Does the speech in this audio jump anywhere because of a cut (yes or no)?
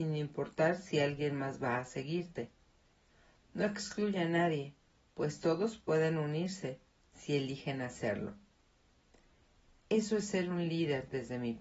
no